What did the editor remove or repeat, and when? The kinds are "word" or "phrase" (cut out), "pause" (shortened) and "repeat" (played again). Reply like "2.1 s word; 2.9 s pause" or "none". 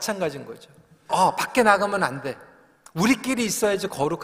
1.1 s word